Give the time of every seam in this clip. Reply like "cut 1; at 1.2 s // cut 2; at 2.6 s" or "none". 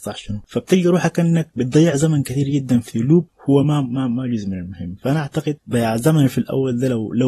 none